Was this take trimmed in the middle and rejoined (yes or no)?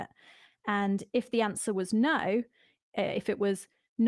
no